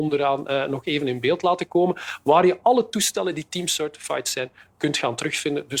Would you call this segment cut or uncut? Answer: uncut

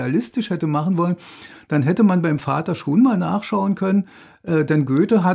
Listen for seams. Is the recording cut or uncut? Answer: uncut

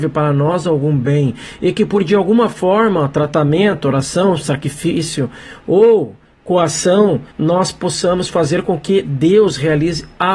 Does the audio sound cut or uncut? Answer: cut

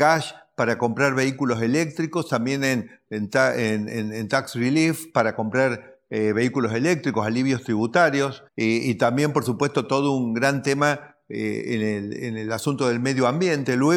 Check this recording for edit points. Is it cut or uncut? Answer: cut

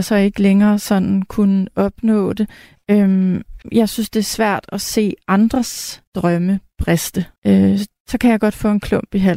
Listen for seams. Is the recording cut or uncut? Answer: cut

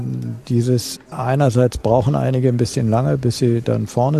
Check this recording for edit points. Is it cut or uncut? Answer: cut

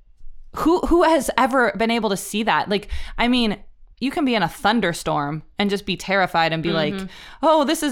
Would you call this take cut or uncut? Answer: cut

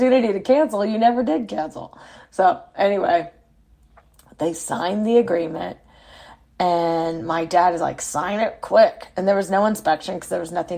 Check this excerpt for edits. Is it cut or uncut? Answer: uncut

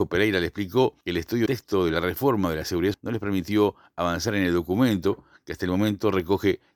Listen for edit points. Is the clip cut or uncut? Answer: cut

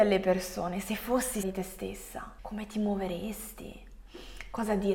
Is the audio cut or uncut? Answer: cut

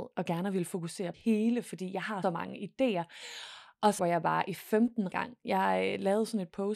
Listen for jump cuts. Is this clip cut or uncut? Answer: cut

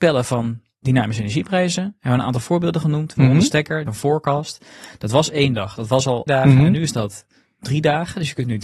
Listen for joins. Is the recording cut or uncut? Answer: cut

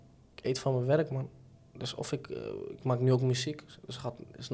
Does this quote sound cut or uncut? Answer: uncut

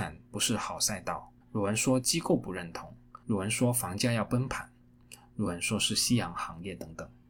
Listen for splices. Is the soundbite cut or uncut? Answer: cut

